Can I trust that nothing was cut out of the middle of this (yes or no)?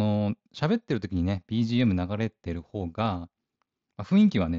yes